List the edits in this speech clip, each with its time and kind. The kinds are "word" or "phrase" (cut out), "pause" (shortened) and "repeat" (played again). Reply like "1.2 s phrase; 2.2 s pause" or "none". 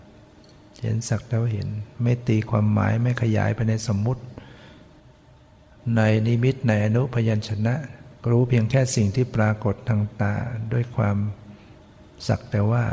8.2 s pause